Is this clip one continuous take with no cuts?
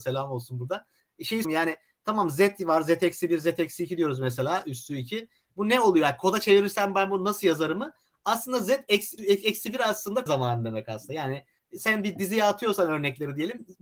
no; 3 cuts; at 1.4 s, 9.2 s, 10.3 s

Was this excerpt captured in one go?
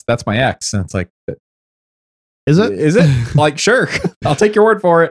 yes; 0 cuts

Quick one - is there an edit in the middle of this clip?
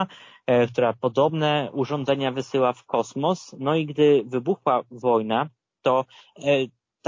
no; 0 cuts

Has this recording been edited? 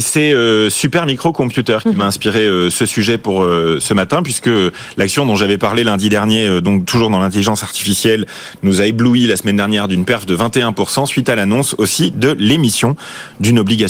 no; 0 cuts

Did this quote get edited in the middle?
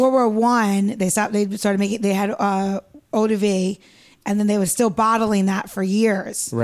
no; 0 cuts

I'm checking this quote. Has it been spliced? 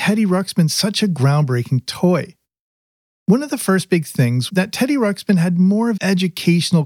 yes; 2 cuts; at 4.5 s, 6.0 s

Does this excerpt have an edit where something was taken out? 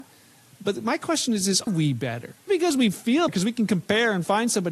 yes; 3 cuts; at 1.7 s, 2.5 s, 3.3 s

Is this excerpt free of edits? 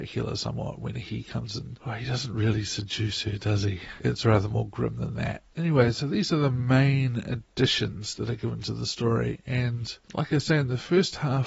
yes; 0 cuts

